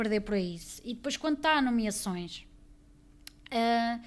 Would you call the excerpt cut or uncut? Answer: uncut